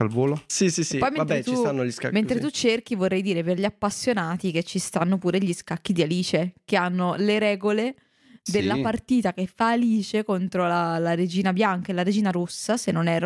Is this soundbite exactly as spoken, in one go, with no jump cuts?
yes; 0 cuts

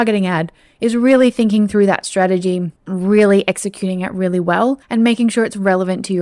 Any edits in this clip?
yes; 2 cuts; at 2.8 s, 4.8 s

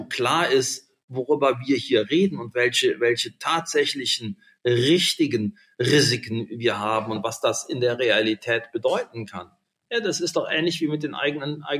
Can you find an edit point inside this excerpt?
no; 0 cuts

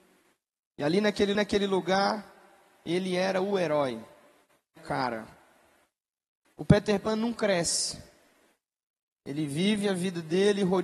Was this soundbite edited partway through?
yes; 3 cuts; at 1.3 s, 4.8 s, 6.6 s

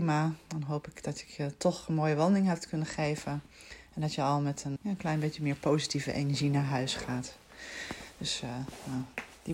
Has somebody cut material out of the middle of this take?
yes; 1 cut; at 4.8 s

